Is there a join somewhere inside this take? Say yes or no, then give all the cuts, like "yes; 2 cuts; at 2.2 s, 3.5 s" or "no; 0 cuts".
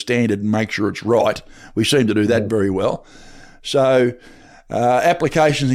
no; 0 cuts